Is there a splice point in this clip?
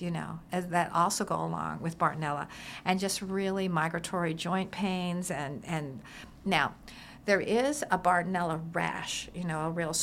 no; 0 cuts

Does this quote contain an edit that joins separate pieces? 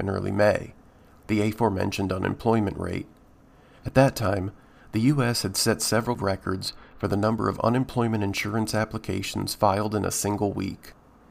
no; 0 cuts

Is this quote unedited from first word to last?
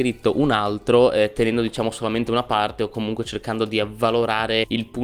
yes; 0 cuts

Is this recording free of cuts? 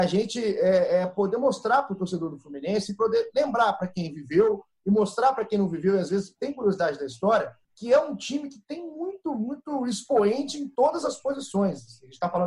no; 1 cut; at 7.6 s

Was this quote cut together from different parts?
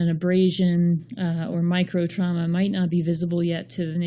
no; 0 cuts

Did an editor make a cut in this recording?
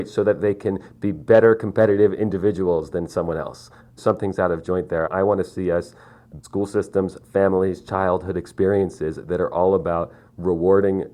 yes; 1 cut; at 6.4 s

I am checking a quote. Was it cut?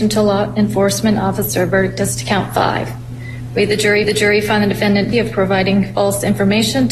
yes; 2 cuts; at 4.0 s, 5.1 s

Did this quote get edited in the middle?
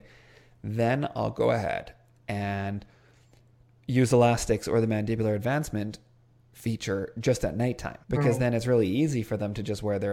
yes; 1 cut; at 8.0 s

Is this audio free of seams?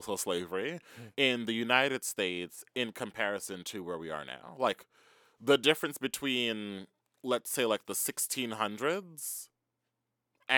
yes; 0 cuts

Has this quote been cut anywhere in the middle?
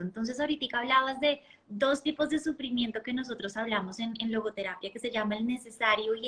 no; 0 cuts

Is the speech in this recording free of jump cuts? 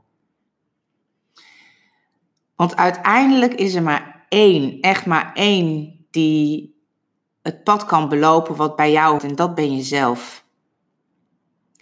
no; 1 cut; at 9.2 s

